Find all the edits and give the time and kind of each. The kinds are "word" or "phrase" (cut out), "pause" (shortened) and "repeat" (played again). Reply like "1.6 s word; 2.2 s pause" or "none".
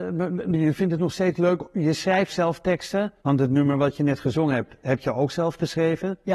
2.3 s word; 3.2 s pause